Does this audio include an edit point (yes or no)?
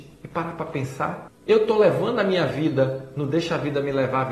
no